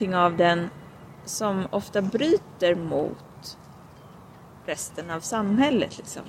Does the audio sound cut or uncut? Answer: cut